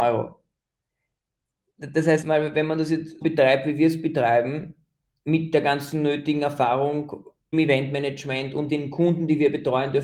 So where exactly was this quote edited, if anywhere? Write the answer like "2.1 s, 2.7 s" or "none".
2.2 s, 3.2 s, 7.5 s, 8.7 s